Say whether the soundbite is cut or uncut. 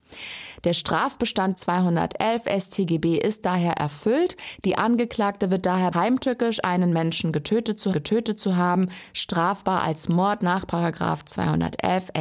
cut